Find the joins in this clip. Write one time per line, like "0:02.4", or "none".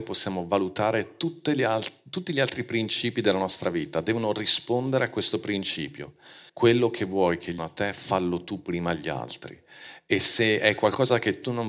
0:06.5
0:07.6